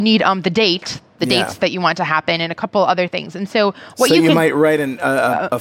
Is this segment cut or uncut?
uncut